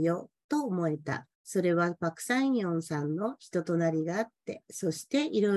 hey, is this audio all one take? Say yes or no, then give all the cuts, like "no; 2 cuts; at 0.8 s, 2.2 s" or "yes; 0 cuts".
no; 1 cut; at 1.3 s